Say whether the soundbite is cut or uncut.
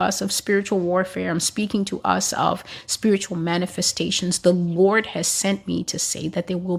uncut